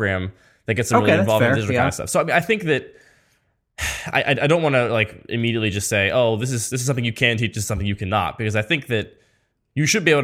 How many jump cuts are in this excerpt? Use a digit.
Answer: 0